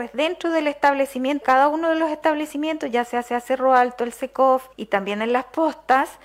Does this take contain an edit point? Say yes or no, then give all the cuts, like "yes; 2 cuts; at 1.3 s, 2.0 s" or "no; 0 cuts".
yes; 3 cuts; at 1.4 s, 3.2 s, 4.7 s